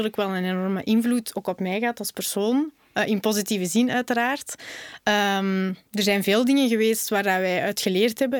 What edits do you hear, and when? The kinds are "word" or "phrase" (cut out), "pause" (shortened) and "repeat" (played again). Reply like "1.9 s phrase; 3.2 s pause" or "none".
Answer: 5.8 s pause